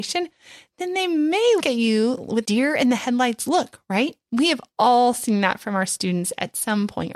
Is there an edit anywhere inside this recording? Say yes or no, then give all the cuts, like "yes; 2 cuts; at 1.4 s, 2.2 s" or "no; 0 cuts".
yes; 2 cuts; at 1.6 s, 2.4 s